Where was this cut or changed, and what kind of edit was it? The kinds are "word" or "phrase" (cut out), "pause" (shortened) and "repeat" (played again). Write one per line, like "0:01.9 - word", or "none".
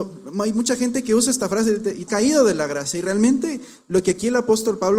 0:02.1 - phrase